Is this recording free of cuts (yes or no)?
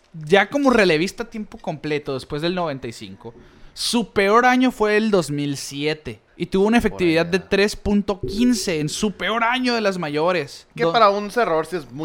no